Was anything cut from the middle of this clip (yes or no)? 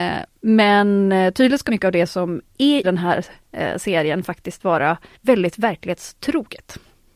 yes